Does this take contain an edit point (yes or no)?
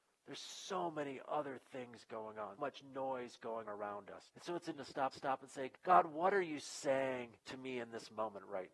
yes